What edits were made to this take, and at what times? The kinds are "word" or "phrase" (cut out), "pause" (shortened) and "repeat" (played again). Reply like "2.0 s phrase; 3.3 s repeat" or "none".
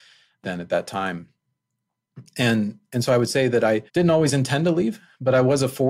3.9 s pause